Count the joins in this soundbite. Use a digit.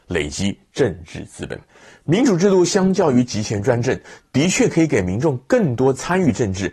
1